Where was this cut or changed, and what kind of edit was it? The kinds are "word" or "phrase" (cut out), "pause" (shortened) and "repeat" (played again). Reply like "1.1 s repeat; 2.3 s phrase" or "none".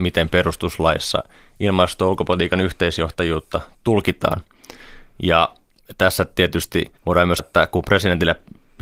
7.0 s pause; 7.4 s word

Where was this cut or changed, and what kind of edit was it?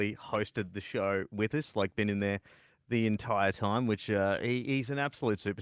none

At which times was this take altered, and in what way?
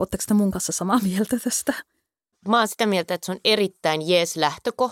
none

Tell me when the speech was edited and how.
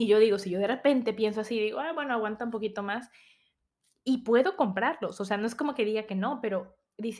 none

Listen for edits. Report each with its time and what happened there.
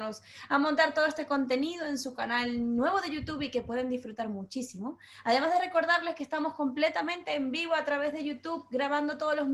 none

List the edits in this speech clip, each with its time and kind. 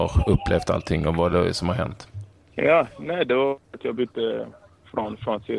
none

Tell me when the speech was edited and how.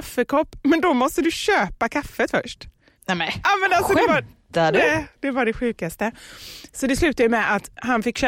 none

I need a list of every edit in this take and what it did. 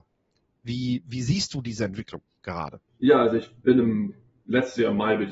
2.9 s pause

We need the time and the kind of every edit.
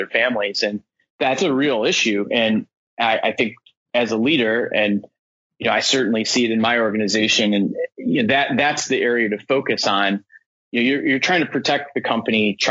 none

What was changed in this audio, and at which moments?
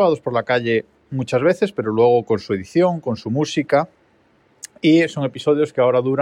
none

